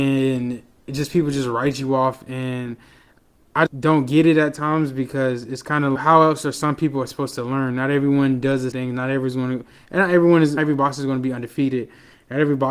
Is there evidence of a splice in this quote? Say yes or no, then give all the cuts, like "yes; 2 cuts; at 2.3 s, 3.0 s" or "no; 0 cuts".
yes; 4 cuts; at 3.7 s, 6.0 s, 8.7 s, 10.6 s